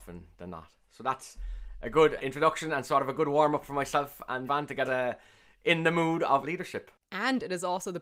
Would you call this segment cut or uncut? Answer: cut